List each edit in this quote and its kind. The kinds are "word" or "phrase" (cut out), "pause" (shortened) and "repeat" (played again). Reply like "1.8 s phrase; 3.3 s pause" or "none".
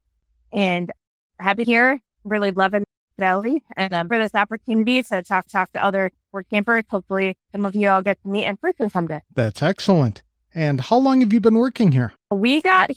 1.6 s phrase; 3.2 s phrase; 4.1 s phrase; 5.5 s repeat; 7.4 s pause; 9.2 s pause